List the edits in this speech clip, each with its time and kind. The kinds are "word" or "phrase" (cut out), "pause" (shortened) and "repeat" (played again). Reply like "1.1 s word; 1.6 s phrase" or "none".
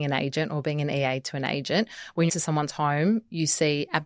2.3 s phrase